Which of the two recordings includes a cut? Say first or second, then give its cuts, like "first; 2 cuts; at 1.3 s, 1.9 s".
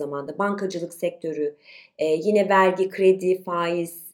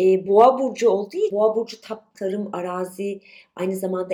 second; 2 cuts; at 1.3 s, 2.1 s